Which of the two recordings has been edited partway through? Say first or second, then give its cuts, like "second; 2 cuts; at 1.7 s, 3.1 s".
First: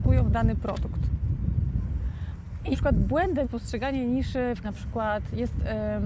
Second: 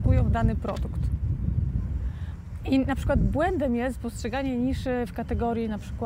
first; 3 cuts; at 2.7 s, 3.4 s, 4.6 s